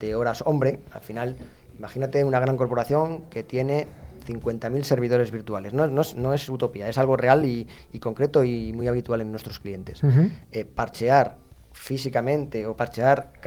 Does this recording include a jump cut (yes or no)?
no